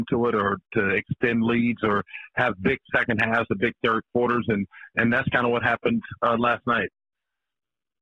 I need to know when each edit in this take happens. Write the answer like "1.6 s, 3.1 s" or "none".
none